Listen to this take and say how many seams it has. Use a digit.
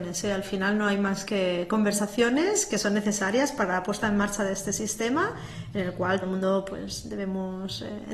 1